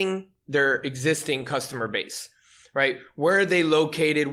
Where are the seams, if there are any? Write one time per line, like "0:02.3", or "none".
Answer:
none